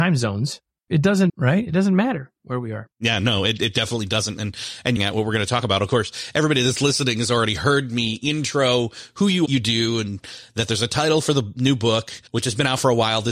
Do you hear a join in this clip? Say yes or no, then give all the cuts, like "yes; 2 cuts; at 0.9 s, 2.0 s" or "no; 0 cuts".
yes; 5 cuts; at 1.3 s, 2.9 s, 5.0 s, 9.5 s, 12.3 s